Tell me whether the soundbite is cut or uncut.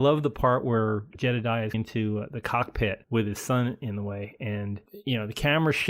cut